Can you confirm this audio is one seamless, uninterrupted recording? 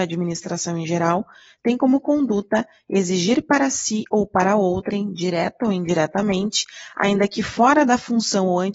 yes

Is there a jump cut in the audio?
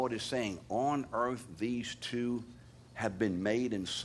no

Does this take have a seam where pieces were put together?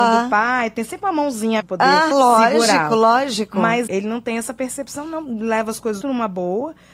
yes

